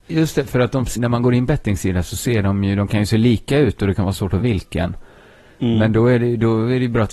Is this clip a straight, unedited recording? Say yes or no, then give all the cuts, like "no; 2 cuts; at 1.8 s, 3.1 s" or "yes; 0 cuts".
no; 3 cuts; at 0.9 s, 1.5 s, 4.4 s